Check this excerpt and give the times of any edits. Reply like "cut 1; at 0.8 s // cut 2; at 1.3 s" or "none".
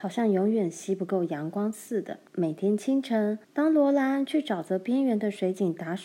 cut 1; at 2.3 s // cut 2; at 3.4 s

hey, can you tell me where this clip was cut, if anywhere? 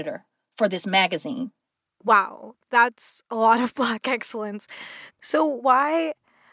none

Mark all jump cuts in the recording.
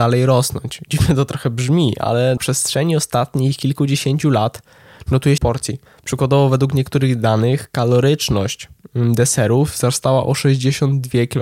cut 1; at 2.4 s // cut 2; at 5.4 s // cut 3; at 5.9 s

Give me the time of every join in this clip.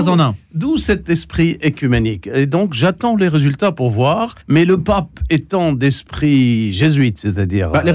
cut 1; at 4.4 s

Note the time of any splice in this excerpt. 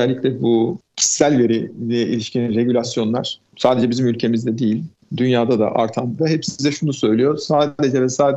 cut 1; at 6.2 s

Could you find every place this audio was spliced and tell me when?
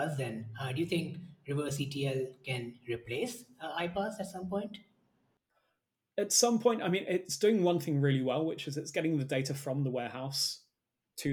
none

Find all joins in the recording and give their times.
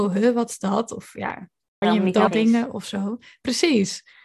cut 1; at 1.8 s // cut 2; at 2.3 s

